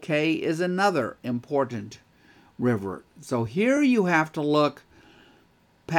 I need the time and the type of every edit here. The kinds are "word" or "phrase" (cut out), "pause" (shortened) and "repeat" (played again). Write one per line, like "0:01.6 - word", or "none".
none